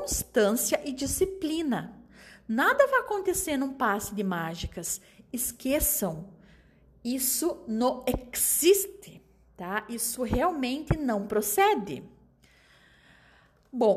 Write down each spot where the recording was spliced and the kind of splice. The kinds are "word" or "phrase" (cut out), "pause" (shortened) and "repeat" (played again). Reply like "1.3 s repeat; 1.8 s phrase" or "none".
none